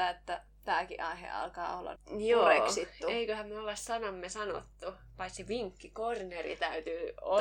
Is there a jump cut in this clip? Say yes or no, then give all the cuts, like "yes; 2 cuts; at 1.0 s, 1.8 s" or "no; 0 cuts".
yes; 1 cut; at 2.0 s